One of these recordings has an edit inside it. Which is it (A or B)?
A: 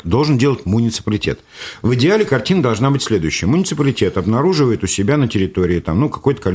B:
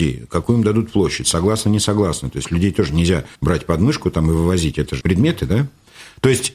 B